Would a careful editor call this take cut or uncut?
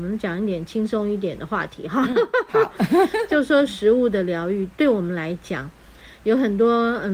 uncut